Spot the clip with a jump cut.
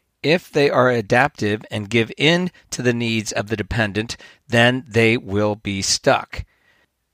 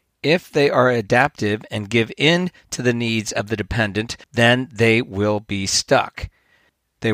second; 1 cut; at 4.2 s

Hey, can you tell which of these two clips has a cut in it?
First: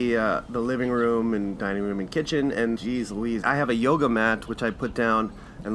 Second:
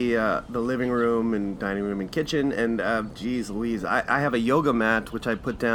first; 2 cuts; at 2.8 s, 3.4 s

